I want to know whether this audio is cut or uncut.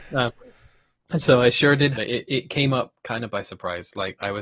cut